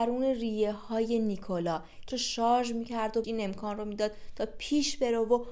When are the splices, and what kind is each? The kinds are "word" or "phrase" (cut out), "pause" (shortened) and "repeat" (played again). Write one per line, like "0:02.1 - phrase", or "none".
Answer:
0:02.1 - word
0:03.2 - word